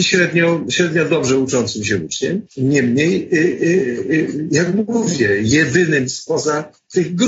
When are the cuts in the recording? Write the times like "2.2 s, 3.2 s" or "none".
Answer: 2.5 s